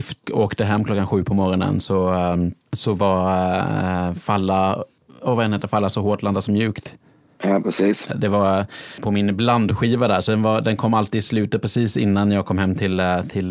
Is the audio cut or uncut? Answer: uncut